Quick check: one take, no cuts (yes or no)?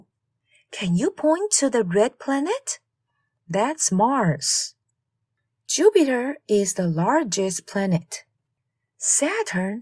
yes